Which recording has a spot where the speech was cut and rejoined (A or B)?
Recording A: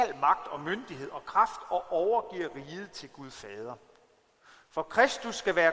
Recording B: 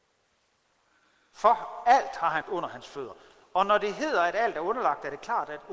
B